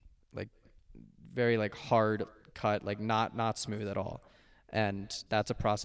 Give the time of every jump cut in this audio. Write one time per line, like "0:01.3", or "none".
none